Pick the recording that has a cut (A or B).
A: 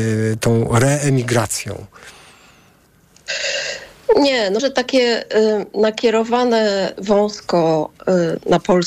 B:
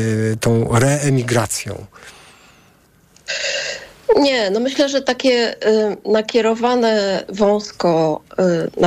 A